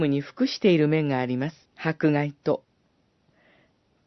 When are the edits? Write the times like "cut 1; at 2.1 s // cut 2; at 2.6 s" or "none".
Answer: cut 1; at 1.7 s

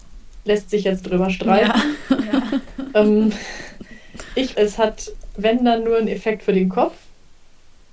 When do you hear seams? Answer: cut 1; at 4.6 s

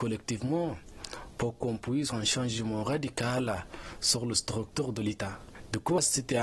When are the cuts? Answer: cut 1; at 2.1 s

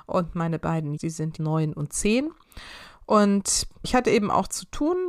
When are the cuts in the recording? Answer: cut 1; at 1.0 s // cut 2; at 1.4 s // cut 3; at 3.8 s

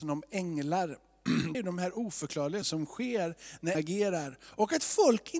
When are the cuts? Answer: cut 1; at 1.5 s // cut 2; at 2.6 s // cut 3; at 3.7 s

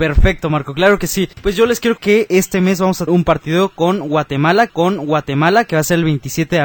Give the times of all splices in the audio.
cut 1; at 1.3 s // cut 2; at 2.0 s // cut 3; at 3.1 s // cut 4; at 4.7 s

